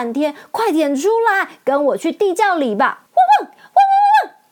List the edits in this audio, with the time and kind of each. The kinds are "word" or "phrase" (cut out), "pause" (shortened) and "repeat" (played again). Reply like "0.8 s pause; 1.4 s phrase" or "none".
3.1 s pause